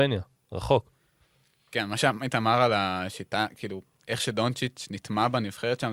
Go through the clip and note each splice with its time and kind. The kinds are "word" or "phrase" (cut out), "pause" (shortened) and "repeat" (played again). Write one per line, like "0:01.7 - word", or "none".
none